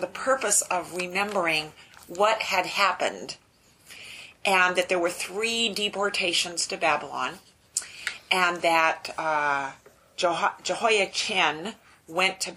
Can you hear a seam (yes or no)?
no